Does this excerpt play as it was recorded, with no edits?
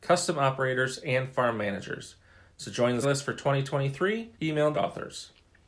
no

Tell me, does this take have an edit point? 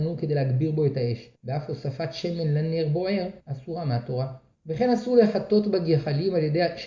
yes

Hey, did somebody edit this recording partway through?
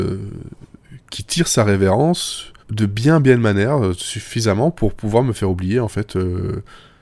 yes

